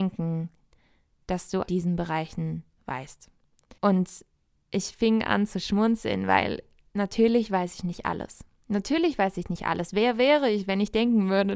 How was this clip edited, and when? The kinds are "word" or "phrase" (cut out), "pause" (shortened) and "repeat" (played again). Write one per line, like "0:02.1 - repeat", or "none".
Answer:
0:01.7 - phrase
0:03.8 - pause